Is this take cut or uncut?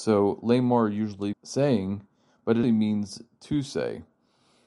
cut